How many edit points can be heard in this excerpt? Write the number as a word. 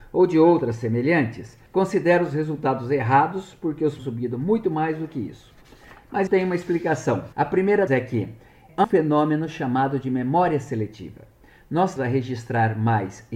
seven